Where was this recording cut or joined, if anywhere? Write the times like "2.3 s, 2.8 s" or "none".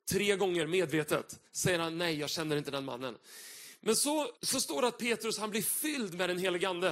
1.5 s, 4.4 s

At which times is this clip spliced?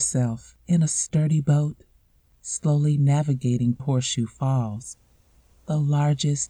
3.8 s

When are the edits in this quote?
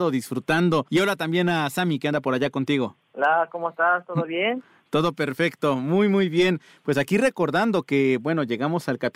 none

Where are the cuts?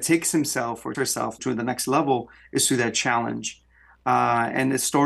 0.9 s, 1.4 s

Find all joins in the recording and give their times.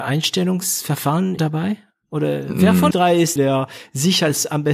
1.4 s, 2.9 s, 3.4 s

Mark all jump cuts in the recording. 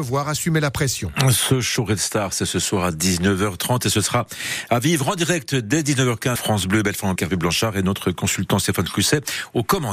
6.4 s, 7.2 s

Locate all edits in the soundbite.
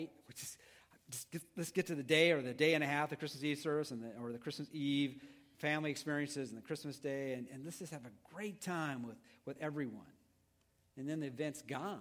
none

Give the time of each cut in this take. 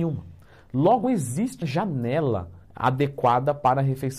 1.0 s, 1.6 s, 2.6 s

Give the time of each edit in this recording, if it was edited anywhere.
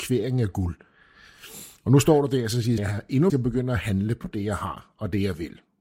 2.8 s, 3.3 s

